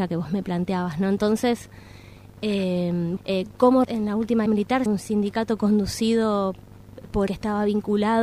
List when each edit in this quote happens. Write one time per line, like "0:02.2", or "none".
0:03.2
0:03.8
0:04.5
0:04.9
0:07.3